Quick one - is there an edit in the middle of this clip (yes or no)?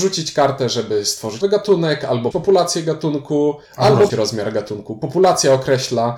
yes